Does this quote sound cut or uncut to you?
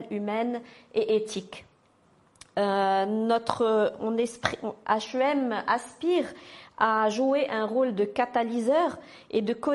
uncut